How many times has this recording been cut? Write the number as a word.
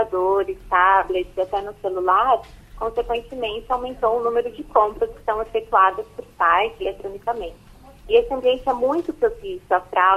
one